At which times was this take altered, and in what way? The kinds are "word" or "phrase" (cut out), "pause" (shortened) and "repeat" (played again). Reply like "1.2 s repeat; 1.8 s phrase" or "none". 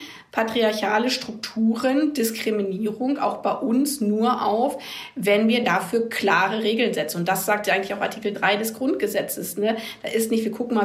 none